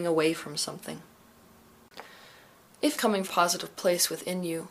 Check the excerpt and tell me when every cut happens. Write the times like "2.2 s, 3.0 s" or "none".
3.0 s, 3.3 s